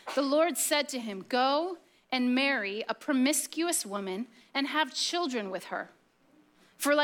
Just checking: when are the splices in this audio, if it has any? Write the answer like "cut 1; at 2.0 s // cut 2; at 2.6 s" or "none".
none